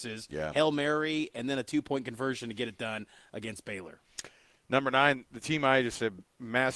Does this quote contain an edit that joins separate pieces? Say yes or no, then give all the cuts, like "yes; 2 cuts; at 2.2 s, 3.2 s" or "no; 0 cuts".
no; 0 cuts